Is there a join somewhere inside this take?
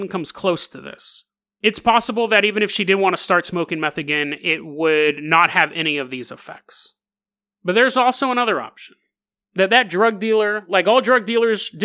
no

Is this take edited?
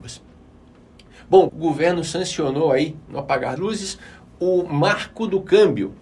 yes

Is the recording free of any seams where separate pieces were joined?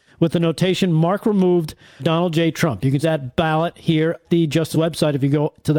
no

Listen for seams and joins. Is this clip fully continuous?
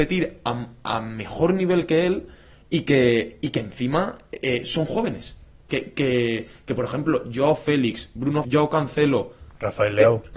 no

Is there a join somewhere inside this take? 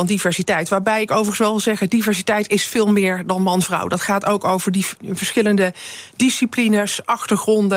no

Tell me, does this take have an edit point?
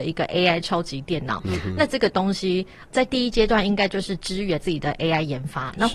yes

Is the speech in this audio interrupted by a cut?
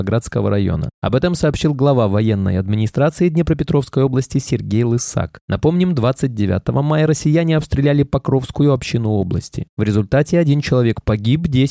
no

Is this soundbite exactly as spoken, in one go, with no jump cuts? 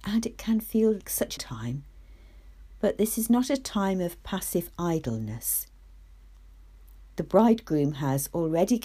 no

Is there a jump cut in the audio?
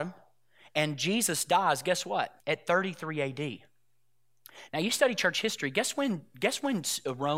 yes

